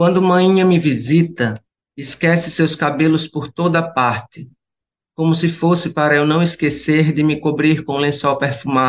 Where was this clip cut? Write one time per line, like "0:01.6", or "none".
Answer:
0:01.7